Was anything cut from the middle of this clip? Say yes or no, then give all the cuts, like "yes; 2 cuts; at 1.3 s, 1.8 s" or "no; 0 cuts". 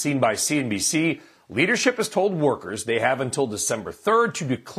no; 0 cuts